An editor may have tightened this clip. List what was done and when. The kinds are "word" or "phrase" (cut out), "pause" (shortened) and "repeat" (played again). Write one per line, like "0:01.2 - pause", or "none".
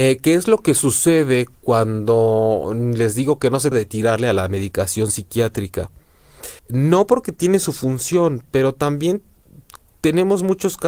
0:03.7 - word
0:06.6 - pause